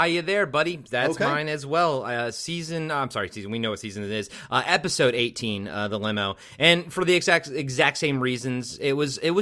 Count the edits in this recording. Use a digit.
0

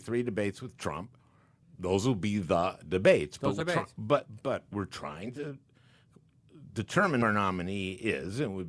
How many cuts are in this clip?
3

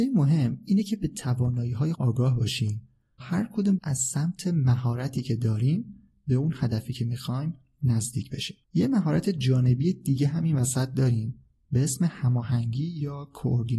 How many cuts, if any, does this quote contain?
4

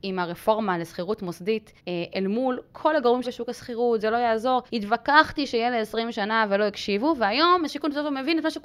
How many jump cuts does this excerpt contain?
4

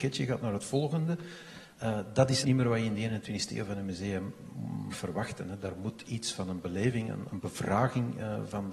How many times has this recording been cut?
3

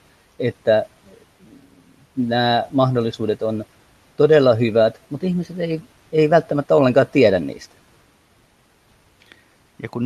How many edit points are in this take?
0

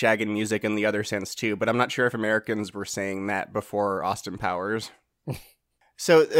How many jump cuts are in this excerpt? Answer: 0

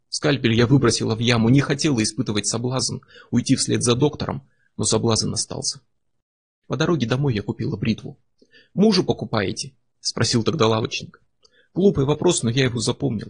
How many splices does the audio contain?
0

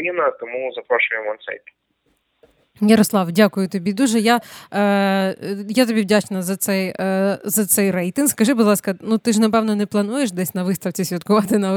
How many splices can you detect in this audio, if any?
0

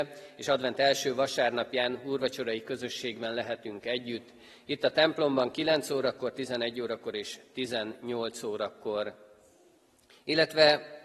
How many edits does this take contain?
0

